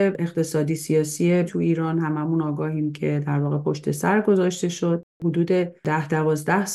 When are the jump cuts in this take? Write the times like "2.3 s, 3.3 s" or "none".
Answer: 1.5 s